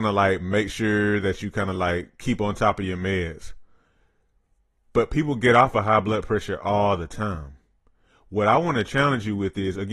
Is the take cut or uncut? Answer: uncut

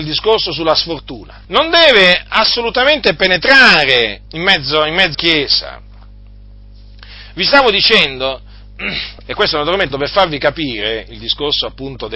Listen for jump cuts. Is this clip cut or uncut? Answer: cut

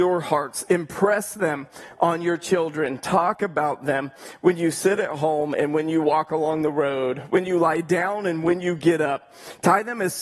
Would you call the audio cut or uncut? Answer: uncut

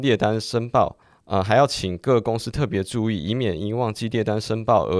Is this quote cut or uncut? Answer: uncut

